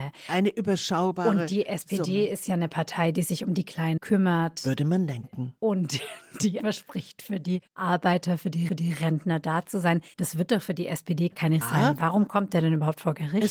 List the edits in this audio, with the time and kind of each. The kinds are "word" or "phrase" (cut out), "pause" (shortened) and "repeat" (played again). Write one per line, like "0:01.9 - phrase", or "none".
0:04.0 - word
0:06.6 - word
0:07.7 - pause
0:08.7 - repeat
0:10.1 - pause
0:11.6 - phrase